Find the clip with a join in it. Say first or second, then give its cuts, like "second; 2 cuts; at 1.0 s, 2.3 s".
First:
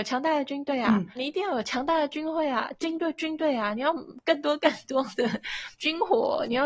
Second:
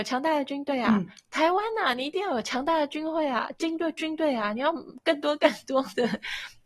first; 2 cuts; at 1.2 s, 5.7 s